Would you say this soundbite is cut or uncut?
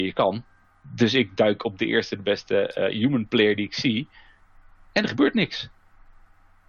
uncut